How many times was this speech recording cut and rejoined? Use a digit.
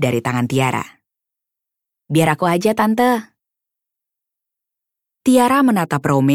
0